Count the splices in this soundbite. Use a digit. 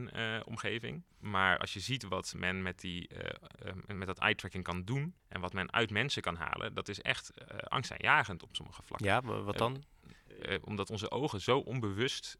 1